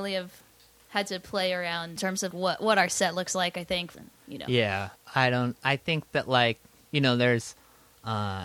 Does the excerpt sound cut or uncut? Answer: cut